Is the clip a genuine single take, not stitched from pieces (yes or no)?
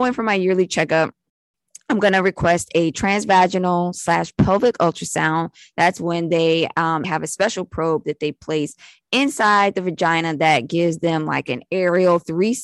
no